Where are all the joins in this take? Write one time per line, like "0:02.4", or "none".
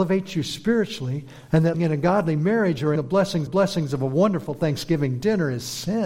0:01.7
0:03.0
0:03.5